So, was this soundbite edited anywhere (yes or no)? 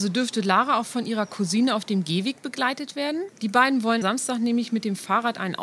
yes